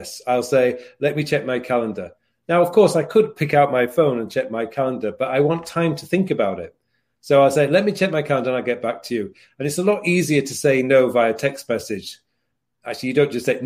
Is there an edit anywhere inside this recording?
no; 0 cuts

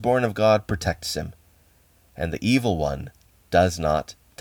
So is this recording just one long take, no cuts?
yes; 0 cuts

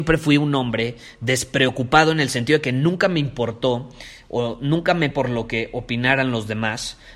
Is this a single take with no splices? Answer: no; 1 cut; at 5.1 s

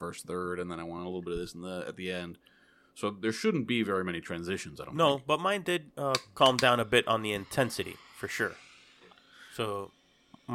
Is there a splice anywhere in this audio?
no; 0 cuts

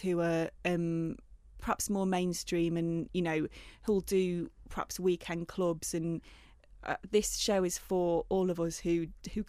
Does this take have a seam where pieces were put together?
no; 0 cuts

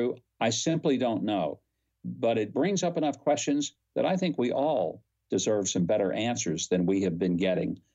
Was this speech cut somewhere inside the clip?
no; 0 cuts

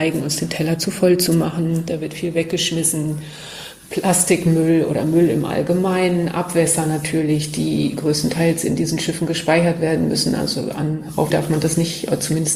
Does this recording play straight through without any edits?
no; 1 cut; at 11.3 s

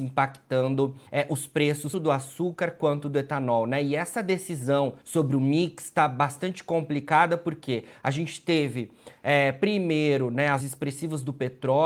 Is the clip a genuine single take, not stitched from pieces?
no; 4 cuts; at 1.1 s, 1.9 s, 5.0 s, 10.6 s

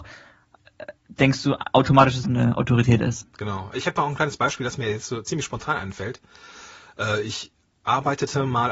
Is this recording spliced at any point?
yes; 2 cuts; at 1.0 s, 2.2 s

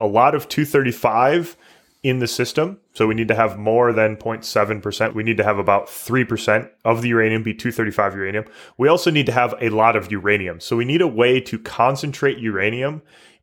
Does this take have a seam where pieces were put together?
no; 0 cuts

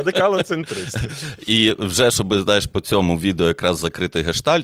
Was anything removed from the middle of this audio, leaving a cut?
no; 0 cuts

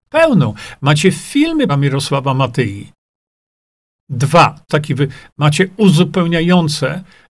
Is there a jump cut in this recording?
yes; 2 cuts; at 1.7 s, 4.7 s

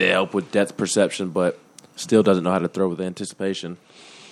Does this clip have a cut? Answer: no; 0 cuts

